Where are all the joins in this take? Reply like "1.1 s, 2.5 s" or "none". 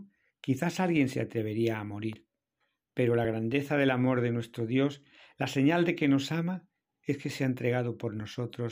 none